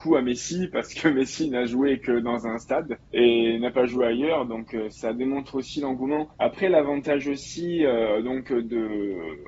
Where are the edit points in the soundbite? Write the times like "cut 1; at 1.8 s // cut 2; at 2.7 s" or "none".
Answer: cut 1; at 3.0 s // cut 2; at 6.3 s